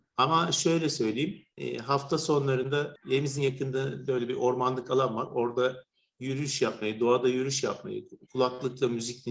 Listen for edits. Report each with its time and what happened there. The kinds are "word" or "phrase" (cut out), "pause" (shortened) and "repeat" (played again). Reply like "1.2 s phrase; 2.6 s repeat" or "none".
1.5 s pause; 8.2 s pause

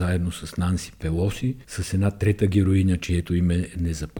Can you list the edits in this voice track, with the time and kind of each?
1.6 s pause

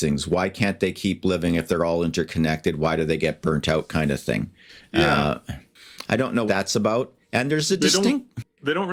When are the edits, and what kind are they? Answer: 6.5 s word

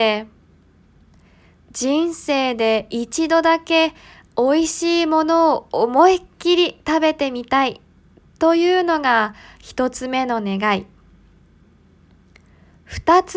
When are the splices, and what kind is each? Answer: none

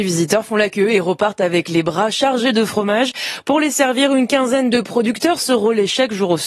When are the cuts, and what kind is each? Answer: none

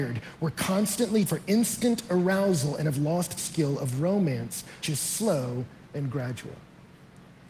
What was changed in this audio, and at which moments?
1.3 s word; 3.4 s phrase; 4.8 s word

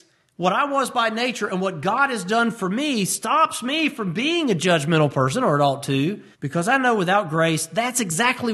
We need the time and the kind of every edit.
6.3 s pause

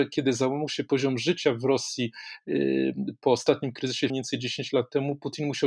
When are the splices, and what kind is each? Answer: 4.1 s word

